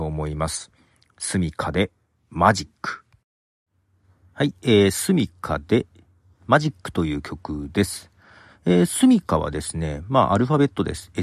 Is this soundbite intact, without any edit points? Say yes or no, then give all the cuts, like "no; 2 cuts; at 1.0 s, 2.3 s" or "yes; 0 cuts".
yes; 0 cuts